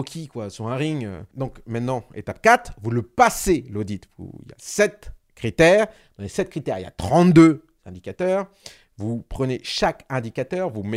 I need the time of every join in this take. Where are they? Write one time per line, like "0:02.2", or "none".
0:05.2